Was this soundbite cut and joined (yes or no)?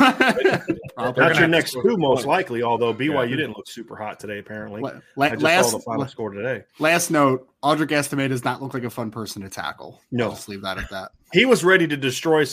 yes